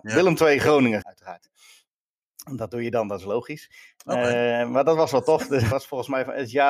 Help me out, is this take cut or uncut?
cut